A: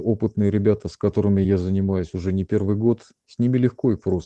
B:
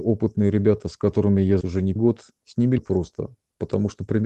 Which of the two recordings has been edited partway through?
B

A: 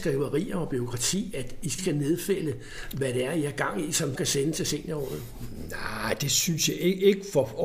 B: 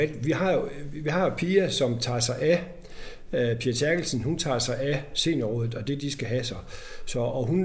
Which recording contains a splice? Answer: A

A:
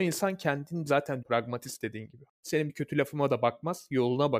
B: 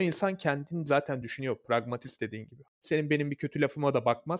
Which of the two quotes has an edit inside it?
A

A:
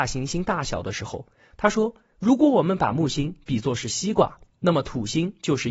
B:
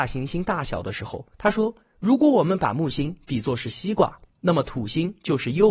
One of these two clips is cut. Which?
B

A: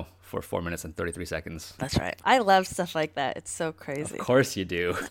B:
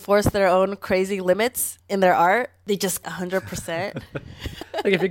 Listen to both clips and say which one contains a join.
B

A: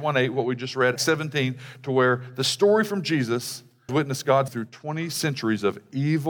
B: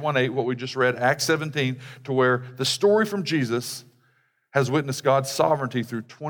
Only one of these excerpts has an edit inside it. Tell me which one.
A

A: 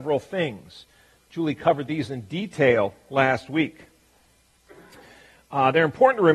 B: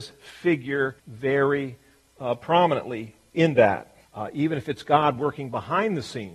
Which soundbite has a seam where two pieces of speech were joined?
B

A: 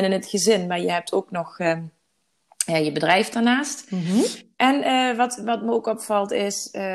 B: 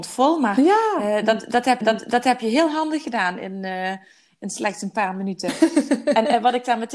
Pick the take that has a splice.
B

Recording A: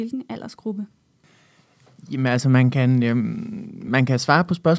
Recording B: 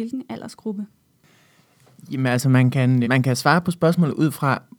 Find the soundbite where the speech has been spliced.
B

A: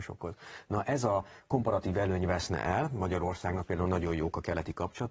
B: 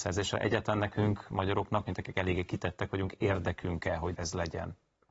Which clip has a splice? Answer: B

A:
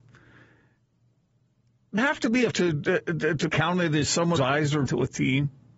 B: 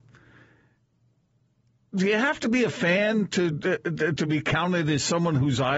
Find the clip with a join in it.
A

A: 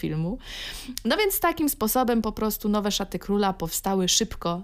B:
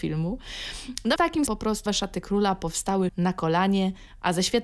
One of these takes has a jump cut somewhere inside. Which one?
B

